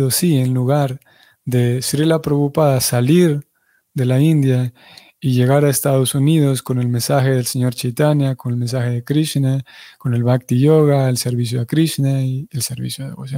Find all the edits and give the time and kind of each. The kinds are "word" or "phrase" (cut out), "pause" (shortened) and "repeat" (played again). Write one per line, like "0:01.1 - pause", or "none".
none